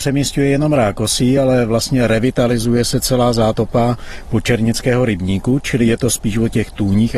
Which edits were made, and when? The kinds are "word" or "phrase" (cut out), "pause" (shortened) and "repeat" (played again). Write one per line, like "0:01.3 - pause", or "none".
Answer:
none